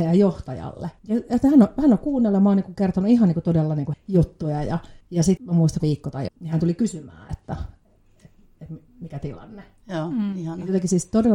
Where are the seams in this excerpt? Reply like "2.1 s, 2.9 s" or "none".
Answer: 1.0 s, 3.9 s, 5.0 s, 5.4 s, 5.8 s, 6.3 s